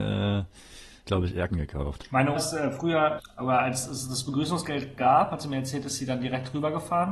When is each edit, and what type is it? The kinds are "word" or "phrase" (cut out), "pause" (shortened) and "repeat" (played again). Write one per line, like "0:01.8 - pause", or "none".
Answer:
0:01.0 - word
0:01.5 - word
0:02.3 - word
0:03.2 - word